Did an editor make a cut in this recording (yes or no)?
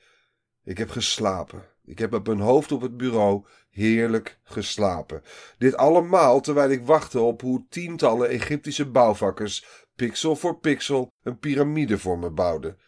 no